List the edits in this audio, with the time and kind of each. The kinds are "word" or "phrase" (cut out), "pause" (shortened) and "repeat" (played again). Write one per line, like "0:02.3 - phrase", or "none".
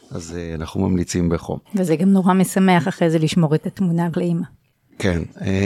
0:01.7 - pause
0:04.1 - word